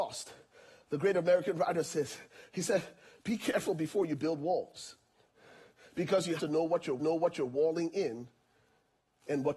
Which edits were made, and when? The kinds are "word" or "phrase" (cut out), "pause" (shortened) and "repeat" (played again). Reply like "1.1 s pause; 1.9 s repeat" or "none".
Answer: 5.2 s pause; 6.4 s word; 7.0 s repeat